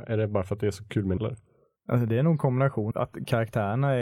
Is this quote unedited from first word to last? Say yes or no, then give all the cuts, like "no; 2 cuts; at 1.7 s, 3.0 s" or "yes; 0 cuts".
no; 2 cuts; at 1.2 s, 2.9 s